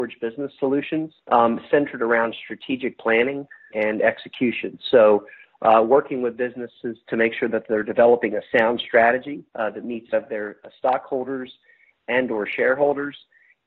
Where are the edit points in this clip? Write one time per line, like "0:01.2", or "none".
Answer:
0:01.2
0:03.7
0:09.5
0:10.1